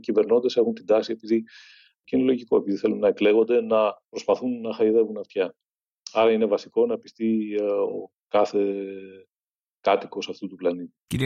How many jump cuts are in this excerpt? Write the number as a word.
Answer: zero